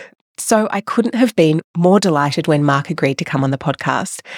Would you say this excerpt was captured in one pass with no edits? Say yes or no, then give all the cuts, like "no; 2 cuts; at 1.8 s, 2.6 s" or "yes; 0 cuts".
yes; 0 cuts